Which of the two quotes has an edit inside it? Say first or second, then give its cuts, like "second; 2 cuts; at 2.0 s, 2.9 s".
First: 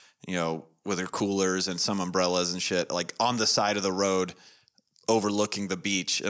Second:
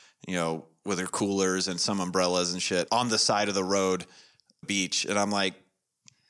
second; 2 cuts; at 2.9 s, 4.6 s